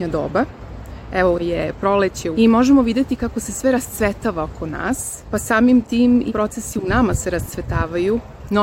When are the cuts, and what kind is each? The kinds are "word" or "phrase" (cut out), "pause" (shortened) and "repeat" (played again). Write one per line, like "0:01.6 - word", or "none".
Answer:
0:01.4 - word
0:02.3 - word
0:05.2 - word
0:06.3 - word